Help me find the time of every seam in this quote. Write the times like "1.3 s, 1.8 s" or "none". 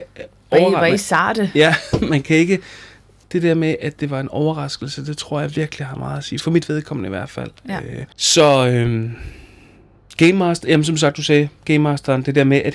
8.1 s